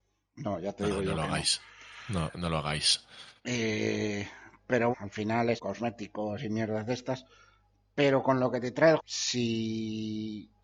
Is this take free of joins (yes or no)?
no